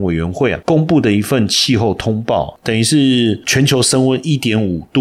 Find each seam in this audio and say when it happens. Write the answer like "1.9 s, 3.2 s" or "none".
none